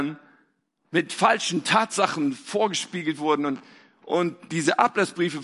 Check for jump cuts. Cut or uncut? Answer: uncut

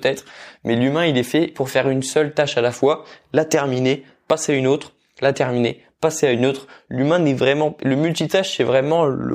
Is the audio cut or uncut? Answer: uncut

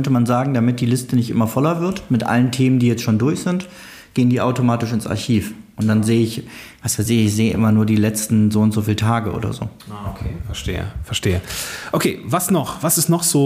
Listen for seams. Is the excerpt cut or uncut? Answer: uncut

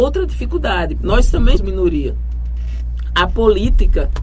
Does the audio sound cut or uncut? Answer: cut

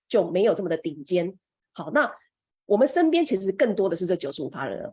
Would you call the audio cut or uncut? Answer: uncut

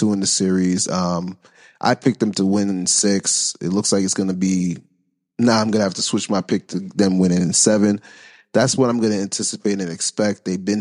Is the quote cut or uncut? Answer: uncut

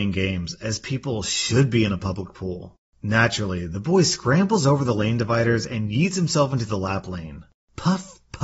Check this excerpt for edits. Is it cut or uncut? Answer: uncut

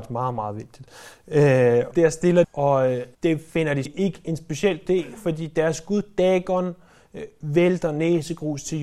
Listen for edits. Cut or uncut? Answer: cut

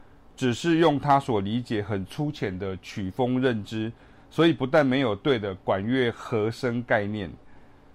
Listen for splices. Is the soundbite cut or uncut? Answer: uncut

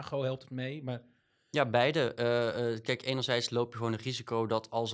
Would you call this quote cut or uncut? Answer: uncut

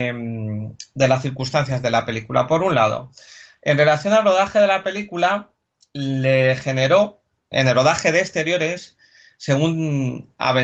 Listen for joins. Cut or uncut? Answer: cut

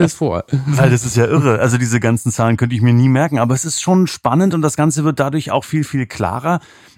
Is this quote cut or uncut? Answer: uncut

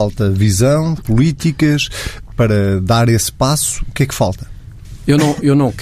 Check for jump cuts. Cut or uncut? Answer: cut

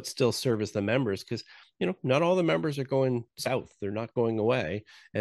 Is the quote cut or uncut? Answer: uncut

